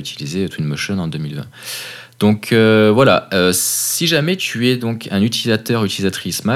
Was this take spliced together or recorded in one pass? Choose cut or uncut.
uncut